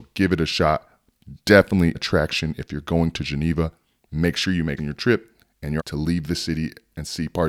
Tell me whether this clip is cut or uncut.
cut